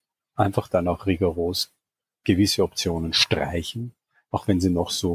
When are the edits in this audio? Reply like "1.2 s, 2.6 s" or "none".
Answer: none